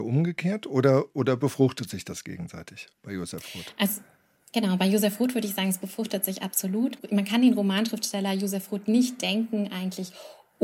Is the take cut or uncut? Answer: cut